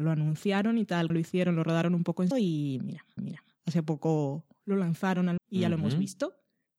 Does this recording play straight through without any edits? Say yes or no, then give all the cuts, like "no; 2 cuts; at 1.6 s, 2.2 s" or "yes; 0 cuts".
no; 4 cuts; at 1.1 s, 2.3 s, 3.2 s, 5.4 s